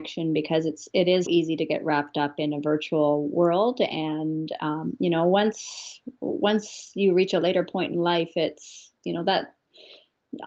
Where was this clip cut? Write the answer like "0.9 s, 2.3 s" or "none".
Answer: 1.3 s, 9.0 s